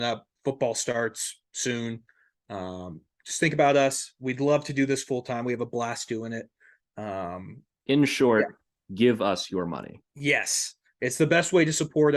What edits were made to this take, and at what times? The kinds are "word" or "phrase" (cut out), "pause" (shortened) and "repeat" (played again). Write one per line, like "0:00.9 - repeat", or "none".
none